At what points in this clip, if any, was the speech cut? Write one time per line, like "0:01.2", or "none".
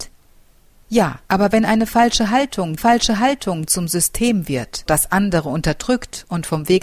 0:01.2
0:02.8
0:04.9

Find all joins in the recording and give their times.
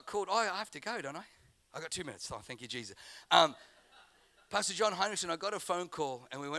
none

